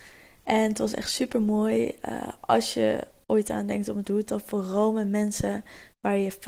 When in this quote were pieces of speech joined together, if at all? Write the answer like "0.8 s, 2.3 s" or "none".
4.0 s